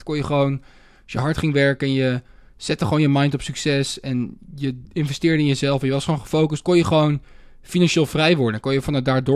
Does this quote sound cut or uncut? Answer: uncut